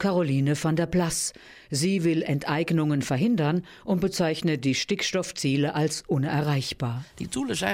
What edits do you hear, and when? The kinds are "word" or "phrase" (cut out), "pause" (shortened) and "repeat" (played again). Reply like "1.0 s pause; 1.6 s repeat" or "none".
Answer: none